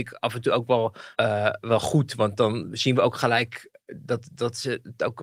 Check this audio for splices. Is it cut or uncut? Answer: cut